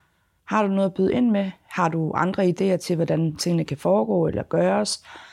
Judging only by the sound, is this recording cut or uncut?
uncut